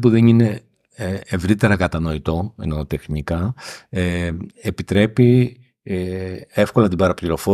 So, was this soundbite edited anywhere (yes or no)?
no